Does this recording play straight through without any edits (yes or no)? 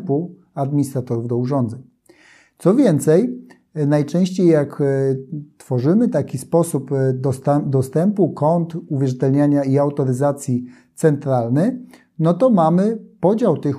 yes